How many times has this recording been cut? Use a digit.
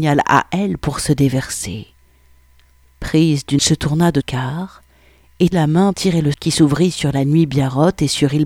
5